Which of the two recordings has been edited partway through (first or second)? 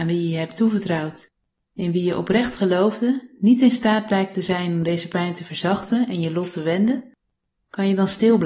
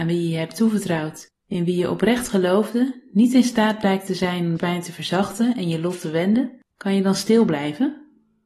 second